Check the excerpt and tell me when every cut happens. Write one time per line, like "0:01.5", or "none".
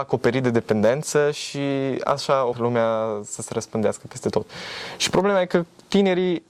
0:02.5